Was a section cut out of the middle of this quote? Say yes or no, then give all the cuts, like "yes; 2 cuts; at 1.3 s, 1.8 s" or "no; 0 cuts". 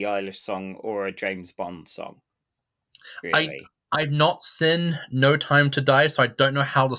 no; 0 cuts